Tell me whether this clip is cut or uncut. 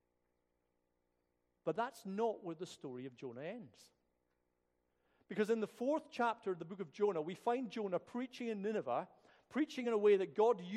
uncut